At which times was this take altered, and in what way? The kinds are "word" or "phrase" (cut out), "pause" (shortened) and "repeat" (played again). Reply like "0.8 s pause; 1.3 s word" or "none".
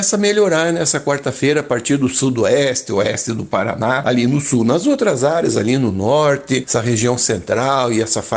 none